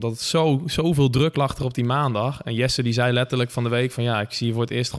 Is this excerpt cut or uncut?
uncut